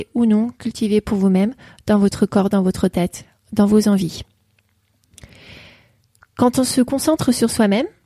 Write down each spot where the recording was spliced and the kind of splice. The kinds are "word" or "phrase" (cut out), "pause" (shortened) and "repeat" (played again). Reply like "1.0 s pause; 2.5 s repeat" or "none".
none